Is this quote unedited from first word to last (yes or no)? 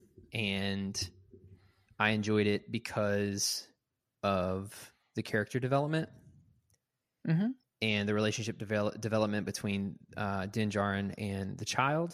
yes